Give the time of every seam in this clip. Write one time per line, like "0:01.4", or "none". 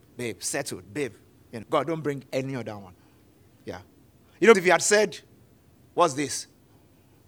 0:01.6
0:04.5